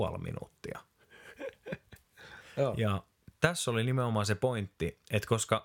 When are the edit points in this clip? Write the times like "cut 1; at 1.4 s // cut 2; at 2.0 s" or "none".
none